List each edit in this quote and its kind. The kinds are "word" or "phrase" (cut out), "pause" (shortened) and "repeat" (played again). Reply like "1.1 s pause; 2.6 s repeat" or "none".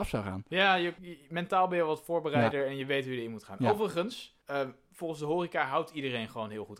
1.0 s word; 4.4 s pause